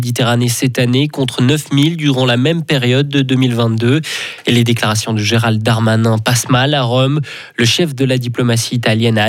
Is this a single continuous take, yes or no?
yes